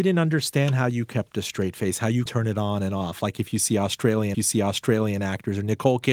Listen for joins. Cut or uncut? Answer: cut